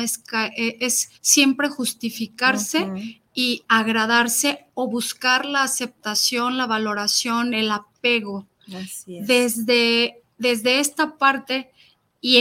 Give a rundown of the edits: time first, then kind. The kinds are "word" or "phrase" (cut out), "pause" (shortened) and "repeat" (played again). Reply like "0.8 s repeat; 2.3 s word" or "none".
1.1 s pause; 10.3 s pause